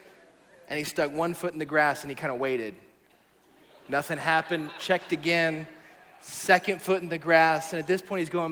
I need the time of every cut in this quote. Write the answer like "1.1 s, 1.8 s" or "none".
none